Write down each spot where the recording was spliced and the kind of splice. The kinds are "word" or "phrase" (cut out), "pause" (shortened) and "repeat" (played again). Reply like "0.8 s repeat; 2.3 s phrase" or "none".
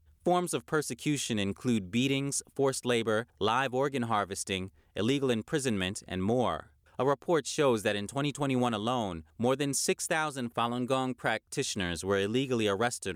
3.3 s pause; 6.9 s pause; 9.3 s pause

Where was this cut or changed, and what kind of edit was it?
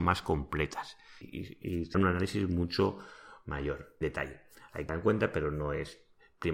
1.2 s word; 1.9 s word; 4.0 s word; 4.9 s word

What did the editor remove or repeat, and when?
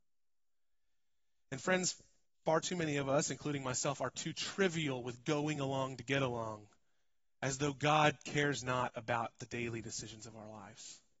none

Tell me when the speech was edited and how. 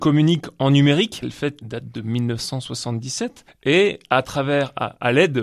1.2 s word; 1.6 s word; 3.5 s pause

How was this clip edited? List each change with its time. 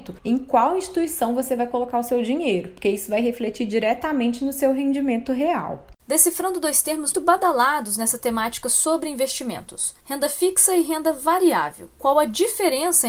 7.1 s word

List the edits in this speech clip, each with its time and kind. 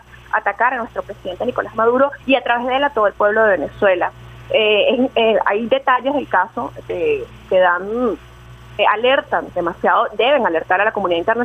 2.2 s pause; 8.8 s word

